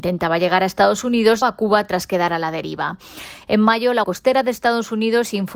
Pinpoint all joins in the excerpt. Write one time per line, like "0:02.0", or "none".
0:01.4
0:04.0